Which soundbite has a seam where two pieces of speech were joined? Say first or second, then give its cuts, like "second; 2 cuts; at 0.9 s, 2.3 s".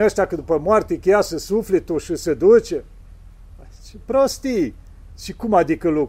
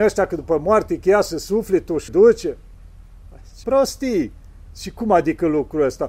second; 2 cuts; at 2.1 s, 3.6 s